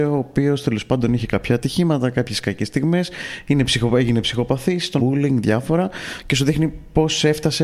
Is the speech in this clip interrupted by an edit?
yes; 1 cut; at 5.0 s

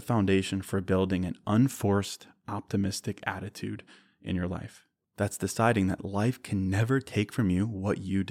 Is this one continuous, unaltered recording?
yes; 0 cuts

